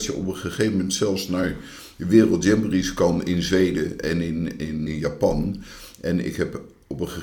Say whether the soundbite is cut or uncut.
cut